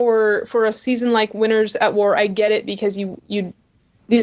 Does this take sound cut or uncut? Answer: uncut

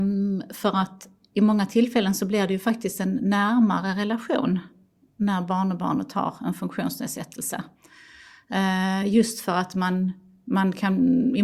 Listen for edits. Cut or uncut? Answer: uncut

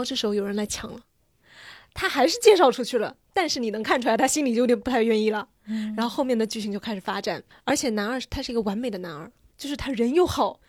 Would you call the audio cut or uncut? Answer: uncut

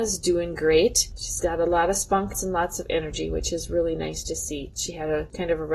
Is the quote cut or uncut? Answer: uncut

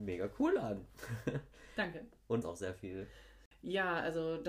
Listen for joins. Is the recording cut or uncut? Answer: cut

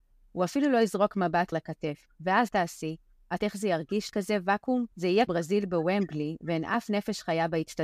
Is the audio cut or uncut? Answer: cut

